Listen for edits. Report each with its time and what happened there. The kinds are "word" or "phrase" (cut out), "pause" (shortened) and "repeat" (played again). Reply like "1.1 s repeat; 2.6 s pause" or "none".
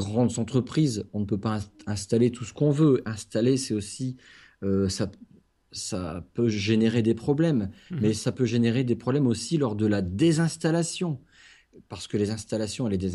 none